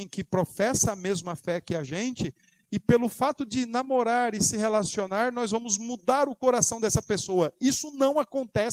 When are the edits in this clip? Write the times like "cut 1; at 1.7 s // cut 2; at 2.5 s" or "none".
none